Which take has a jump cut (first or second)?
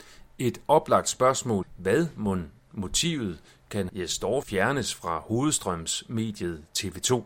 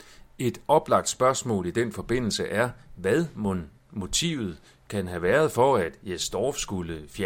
first